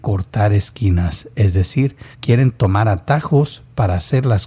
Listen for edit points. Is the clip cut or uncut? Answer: cut